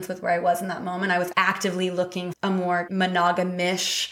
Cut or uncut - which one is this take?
cut